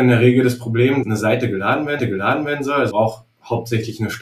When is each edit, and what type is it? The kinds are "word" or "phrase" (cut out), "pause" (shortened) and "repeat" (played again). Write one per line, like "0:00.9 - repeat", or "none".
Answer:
0:01.0 - word
0:02.0 - repeat
0:02.9 - word